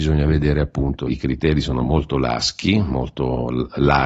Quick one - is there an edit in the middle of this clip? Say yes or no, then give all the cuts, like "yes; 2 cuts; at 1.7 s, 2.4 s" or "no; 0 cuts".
yes; 1 cut; at 1.1 s